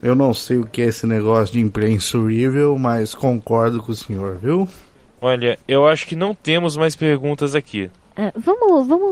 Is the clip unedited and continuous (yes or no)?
yes